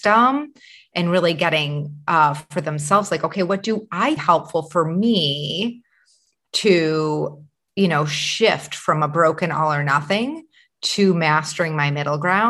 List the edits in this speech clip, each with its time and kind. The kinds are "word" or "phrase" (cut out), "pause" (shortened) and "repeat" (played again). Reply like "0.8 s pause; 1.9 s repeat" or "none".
4.2 s phrase

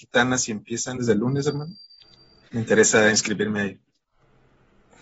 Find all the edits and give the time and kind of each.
1.0 s phrase

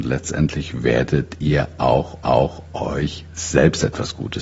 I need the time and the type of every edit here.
2.2 s repeat

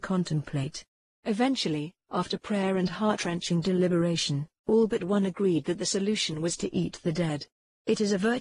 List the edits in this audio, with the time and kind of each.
none

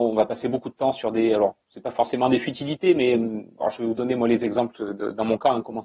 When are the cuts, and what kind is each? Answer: 1.6 s pause

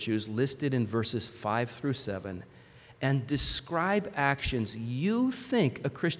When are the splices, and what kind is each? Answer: none

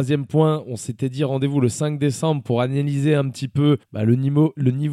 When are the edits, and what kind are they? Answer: 3.8 s pause

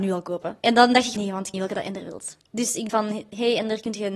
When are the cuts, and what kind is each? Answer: 1.2 s word; 1.5 s phrase; 2.4 s pause; 2.9 s word

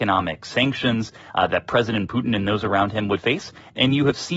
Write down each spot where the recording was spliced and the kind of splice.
none

